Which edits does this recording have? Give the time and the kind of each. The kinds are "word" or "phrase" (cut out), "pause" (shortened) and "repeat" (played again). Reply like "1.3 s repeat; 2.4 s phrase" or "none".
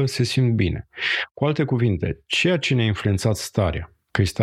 none